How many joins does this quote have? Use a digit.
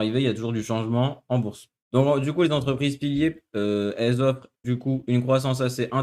1